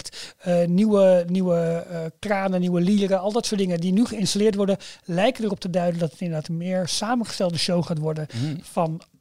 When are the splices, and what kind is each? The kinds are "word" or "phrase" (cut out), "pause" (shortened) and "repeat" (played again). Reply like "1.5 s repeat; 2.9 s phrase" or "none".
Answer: none